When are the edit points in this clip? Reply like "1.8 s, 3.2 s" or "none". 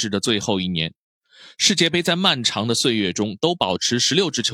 none